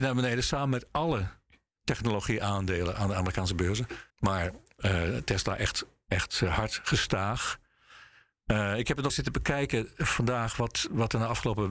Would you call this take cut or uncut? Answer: cut